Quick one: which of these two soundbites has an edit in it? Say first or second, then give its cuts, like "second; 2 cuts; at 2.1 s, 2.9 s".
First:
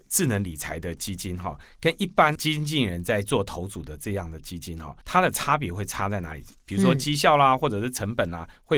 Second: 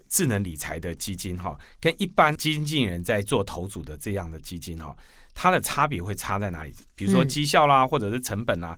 first; 1 cut; at 5.0 s